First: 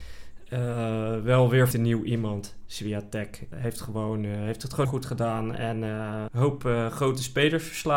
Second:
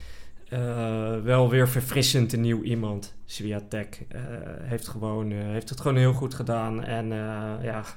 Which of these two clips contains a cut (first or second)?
first